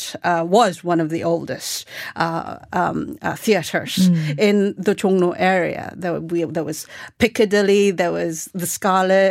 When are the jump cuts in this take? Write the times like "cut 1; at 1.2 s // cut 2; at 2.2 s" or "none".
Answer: none